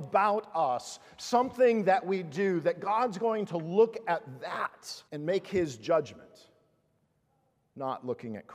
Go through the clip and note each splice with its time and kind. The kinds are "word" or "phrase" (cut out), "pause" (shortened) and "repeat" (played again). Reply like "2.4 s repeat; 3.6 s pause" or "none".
5.1 s pause